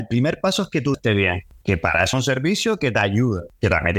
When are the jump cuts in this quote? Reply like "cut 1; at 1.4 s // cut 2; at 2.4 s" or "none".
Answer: cut 1; at 0.9 s // cut 2; at 2.1 s